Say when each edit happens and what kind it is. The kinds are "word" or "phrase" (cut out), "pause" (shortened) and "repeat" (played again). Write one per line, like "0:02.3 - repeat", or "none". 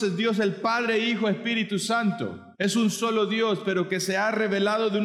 0:02.5 - pause